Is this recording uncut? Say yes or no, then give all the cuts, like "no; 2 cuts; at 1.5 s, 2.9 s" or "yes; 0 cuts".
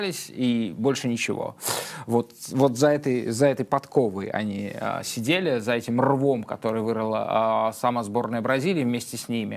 yes; 0 cuts